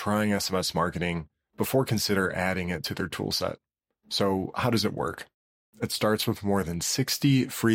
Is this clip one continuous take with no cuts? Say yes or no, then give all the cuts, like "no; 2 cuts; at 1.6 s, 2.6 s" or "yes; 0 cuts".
yes; 0 cuts